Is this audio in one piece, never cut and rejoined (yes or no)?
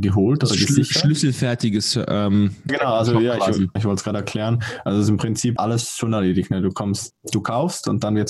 no